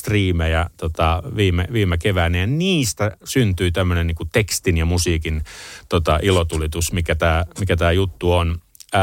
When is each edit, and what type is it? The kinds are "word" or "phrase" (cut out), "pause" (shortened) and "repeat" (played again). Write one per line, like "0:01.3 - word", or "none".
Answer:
none

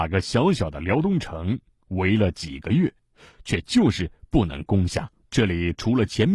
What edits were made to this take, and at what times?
0:05.2 - pause

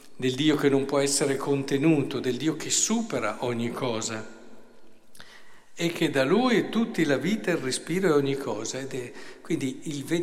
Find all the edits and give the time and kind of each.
none

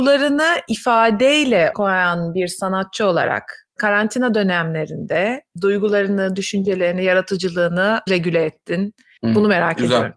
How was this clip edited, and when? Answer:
0:01.7 - word
0:08.1 - word

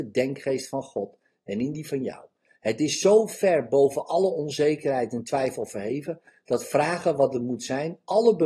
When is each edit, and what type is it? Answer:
none

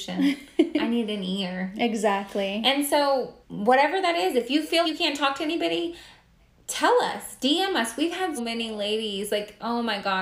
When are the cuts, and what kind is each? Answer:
0:03.4 - pause
0:04.8 - word
0:06.4 - pause
0:08.4 - word

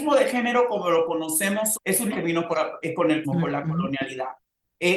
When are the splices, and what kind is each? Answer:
0:01.8 - word
0:02.1 - word
0:02.5 - word
0:03.2 - word

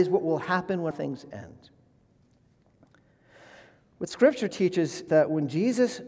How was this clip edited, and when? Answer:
0:00.9 - word
0:05.1 - word

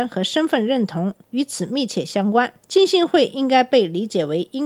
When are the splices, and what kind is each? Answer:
0:02.6 - pause

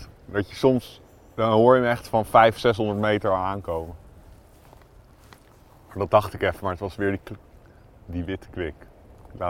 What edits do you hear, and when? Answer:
none

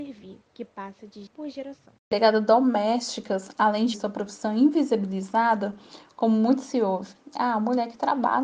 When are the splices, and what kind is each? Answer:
0:01.3 - word
0:02.0 - pause

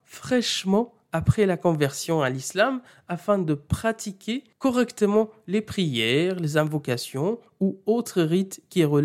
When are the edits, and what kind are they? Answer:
none

